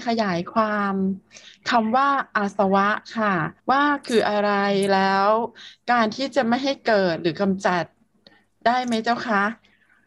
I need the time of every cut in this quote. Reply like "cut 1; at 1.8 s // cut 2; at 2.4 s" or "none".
cut 1; at 3.6 s